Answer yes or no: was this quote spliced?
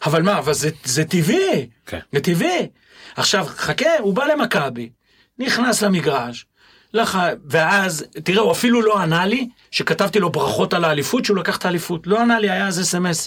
no